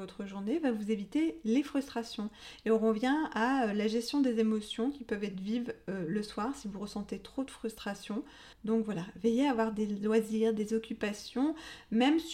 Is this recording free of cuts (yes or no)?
no